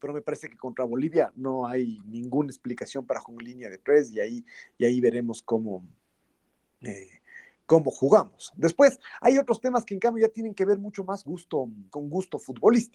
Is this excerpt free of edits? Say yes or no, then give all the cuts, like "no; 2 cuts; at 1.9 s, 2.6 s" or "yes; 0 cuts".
no; 3 cuts; at 3.2 s, 11.2 s, 11.9 s